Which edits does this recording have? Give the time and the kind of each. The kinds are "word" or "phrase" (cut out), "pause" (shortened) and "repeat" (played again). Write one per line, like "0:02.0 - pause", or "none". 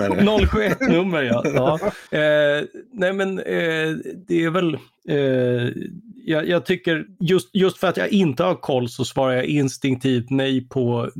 0:02.1 - pause
0:04.2 - pause
0:07.1 - pause